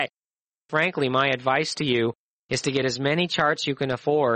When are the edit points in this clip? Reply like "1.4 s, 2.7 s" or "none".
none